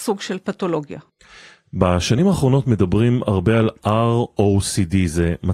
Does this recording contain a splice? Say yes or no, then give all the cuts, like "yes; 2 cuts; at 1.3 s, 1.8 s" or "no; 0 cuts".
no; 0 cuts